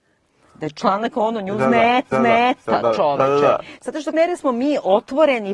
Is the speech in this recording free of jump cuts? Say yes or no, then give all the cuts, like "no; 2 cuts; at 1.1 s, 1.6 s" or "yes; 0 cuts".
no; 2 cuts; at 2.1 s, 4.1 s